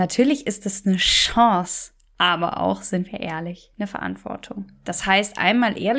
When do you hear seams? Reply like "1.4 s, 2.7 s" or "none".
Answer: none